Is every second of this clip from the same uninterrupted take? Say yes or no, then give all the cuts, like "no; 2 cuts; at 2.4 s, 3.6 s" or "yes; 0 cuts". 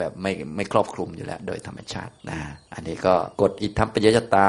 no; 3 cuts; at 2.2 s, 2.6 s, 3.3 s